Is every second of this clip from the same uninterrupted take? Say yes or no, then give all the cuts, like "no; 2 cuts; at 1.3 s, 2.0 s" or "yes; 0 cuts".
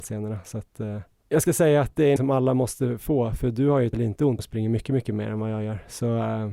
no; 4 cuts; at 1.5 s, 2.2 s, 3.9 s, 4.4 s